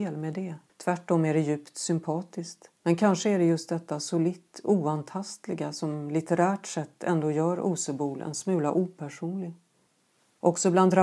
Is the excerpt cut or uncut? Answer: cut